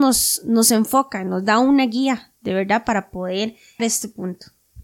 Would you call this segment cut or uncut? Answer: cut